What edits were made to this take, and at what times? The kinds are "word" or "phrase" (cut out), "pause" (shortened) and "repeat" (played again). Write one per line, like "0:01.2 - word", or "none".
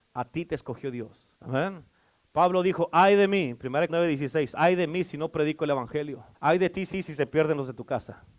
0:01.3 - pause
0:03.9 - word
0:06.3 - pause
0:06.9 - repeat